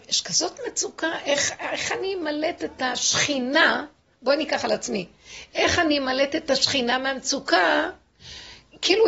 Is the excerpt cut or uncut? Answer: uncut